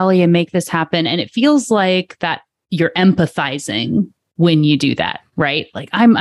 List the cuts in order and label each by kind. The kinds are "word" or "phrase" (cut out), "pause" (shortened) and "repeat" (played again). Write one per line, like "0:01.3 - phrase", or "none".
none